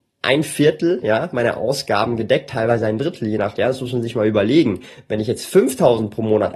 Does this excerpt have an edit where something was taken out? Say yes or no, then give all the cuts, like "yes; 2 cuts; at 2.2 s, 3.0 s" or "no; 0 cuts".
yes; 1 cut; at 3.6 s